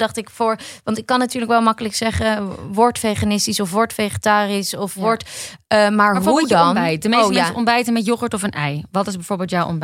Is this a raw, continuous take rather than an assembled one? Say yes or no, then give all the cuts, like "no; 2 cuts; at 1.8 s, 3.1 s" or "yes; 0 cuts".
yes; 0 cuts